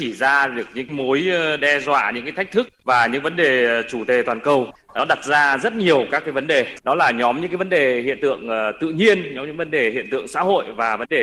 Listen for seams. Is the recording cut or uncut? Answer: uncut